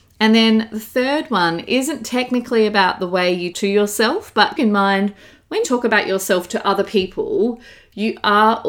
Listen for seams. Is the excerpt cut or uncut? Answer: cut